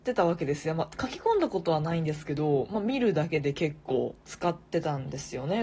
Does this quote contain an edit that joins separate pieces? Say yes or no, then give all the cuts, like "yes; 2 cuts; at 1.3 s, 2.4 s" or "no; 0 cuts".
yes; 1 cut; at 4.2 s